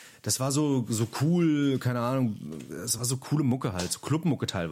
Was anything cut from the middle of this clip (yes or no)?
no